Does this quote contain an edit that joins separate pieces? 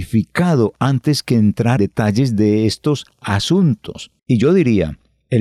yes; 2 cuts; at 1.8 s, 4.2 s

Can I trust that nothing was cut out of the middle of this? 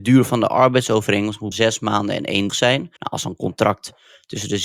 no; 3 cuts; at 1.5 s, 2.5 s, 3.0 s

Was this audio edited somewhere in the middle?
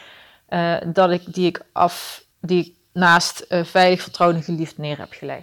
yes; 1 cut; at 2.3 s

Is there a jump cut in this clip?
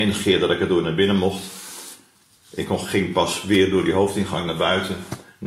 no; 0 cuts

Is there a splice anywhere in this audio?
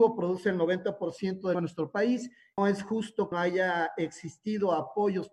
yes; 3 cuts; at 1.5 s, 2.6 s, 3.3 s

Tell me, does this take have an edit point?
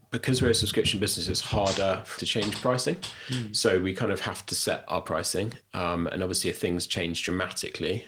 yes; 1 cut; at 2.2 s

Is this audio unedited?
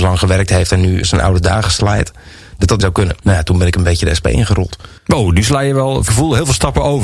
no; 5 cuts; at 1.0 s, 2.8 s, 3.2 s, 5.0 s, 6.1 s

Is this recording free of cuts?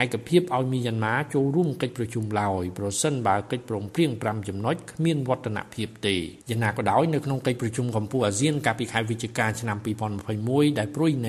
no; 1 cut; at 6.4 s

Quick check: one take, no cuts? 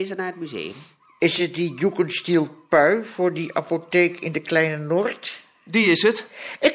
yes; 0 cuts

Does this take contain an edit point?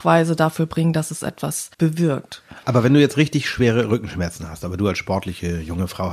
yes; 1 cut; at 1.7 s

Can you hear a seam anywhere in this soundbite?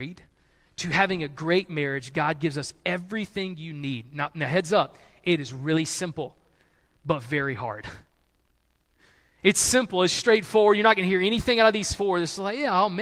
no; 0 cuts

